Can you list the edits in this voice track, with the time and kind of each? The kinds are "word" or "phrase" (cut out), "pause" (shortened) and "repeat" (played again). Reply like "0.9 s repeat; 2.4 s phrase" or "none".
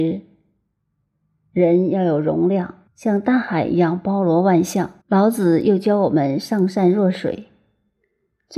2.9 s pause; 5.0 s pause